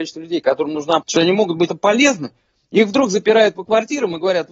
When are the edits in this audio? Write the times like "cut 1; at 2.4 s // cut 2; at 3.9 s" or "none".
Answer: cut 1; at 1.0 s // cut 2; at 1.7 s